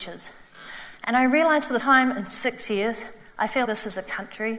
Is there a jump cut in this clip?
yes; 2 cuts; at 1.8 s, 3.6 s

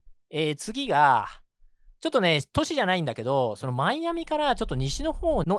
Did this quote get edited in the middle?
no; 0 cuts

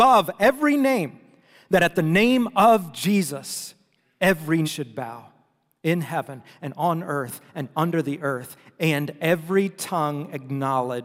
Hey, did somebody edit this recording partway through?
yes; 1 cut; at 4.6 s

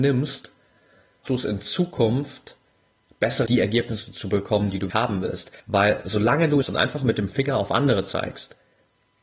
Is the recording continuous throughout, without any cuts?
no; 5 cuts; at 1.2 s, 3.5 s, 4.9 s, 5.6 s, 6.6 s

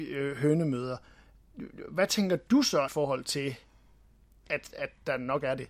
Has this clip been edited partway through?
yes; 1 cut; at 2.9 s

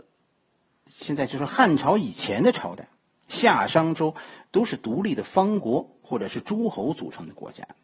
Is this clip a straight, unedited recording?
yes; 0 cuts

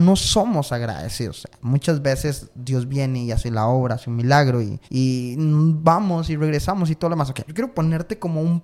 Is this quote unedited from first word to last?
no; 2 cuts; at 4.8 s, 7.5 s

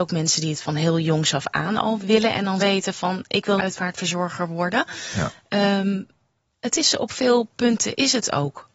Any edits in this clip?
yes; 3 cuts; at 2.0 s, 2.6 s, 3.6 s

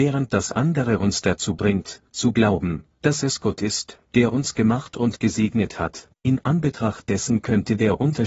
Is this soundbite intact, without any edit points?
yes; 0 cuts

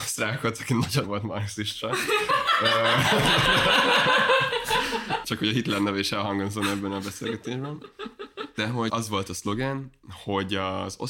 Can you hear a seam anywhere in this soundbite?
yes; 2 cuts; at 1.0 s, 8.9 s

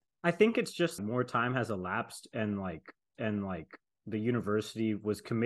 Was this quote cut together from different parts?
yes; 2 cuts; at 1.0 s, 3.1 s

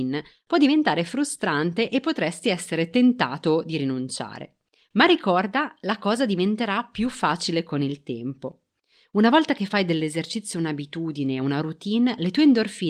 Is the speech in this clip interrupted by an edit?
no; 0 cuts

